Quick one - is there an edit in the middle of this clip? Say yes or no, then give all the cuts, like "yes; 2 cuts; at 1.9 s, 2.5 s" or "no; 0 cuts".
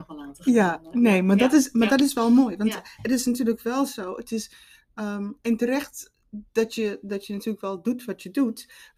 no; 0 cuts